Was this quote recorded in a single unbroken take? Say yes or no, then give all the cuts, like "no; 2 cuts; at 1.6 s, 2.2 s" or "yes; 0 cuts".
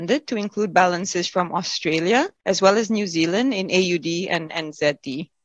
no; 1 cut; at 2.4 s